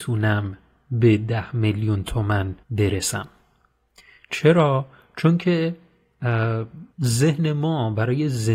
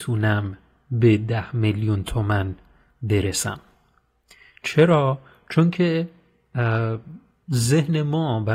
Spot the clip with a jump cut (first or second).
first